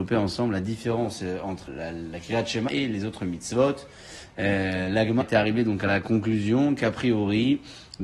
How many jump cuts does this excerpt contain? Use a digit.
3